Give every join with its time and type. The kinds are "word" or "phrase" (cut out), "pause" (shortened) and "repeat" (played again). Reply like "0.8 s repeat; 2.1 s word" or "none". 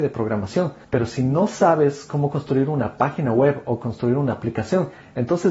none